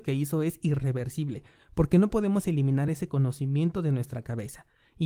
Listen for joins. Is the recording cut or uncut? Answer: uncut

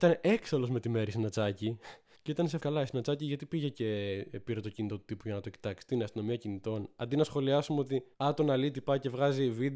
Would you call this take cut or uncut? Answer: cut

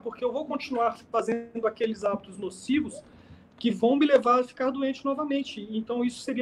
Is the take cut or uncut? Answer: uncut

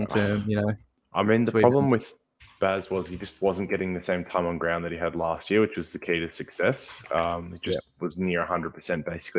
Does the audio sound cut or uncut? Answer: uncut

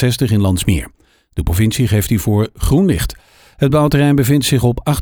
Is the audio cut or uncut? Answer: uncut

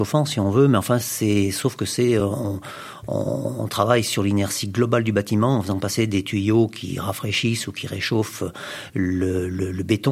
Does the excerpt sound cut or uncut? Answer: uncut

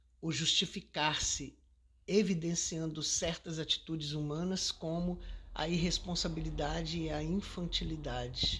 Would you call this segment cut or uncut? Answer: uncut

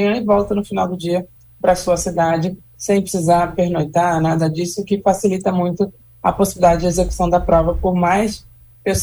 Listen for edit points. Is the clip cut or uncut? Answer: uncut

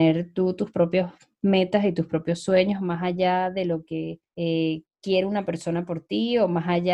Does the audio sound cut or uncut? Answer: cut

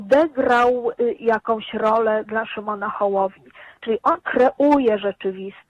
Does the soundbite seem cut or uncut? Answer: cut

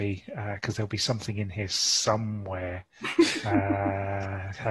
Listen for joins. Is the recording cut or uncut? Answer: uncut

